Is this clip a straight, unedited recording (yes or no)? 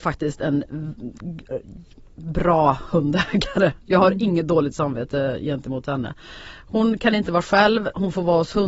yes